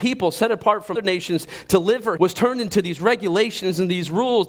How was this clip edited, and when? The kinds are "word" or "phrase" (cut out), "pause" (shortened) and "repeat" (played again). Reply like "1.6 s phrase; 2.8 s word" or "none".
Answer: 0.9 s word; 2.2 s word